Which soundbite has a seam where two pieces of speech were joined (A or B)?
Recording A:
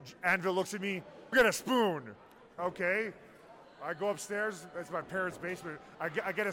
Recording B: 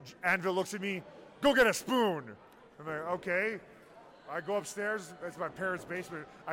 A